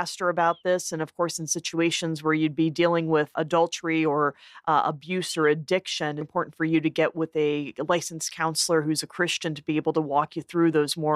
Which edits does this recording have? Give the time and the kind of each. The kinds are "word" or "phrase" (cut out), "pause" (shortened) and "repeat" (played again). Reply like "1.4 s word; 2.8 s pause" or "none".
6.2 s phrase